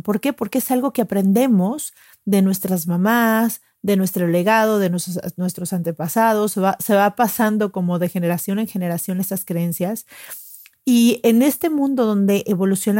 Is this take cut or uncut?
uncut